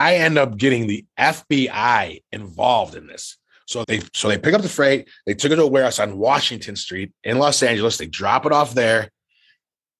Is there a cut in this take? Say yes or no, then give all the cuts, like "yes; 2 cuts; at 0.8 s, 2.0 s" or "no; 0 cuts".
yes; 1 cut; at 3.8 s